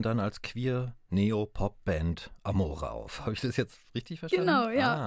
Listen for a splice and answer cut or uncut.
cut